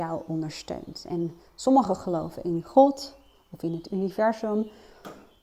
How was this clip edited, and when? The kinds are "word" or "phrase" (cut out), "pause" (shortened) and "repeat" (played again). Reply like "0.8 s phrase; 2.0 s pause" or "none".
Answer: none